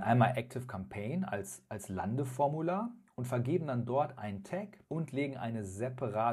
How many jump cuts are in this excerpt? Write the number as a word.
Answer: one